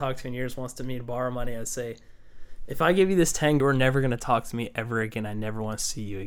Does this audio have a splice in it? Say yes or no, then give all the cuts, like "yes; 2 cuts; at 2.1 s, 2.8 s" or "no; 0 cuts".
yes; 1 cut; at 3.6 s